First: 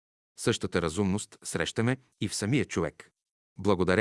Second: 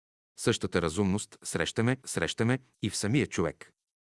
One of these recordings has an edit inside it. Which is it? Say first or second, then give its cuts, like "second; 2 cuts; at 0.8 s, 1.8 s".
second; 1 cut; at 2.0 s